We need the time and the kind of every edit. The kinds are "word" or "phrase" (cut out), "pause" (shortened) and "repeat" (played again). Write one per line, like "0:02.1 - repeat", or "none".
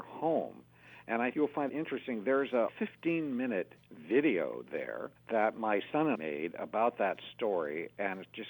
0:01.3 - word
0:01.7 - word
0:02.7 - word
0:03.8 - pause
0:05.2 - pause
0:06.1 - word